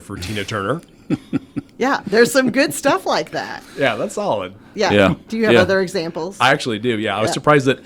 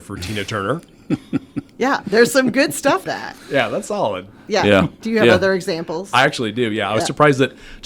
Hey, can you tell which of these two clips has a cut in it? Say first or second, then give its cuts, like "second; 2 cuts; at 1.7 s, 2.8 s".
second; 1 cut; at 3.0 s